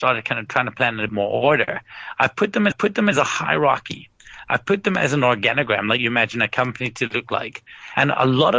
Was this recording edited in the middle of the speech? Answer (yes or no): yes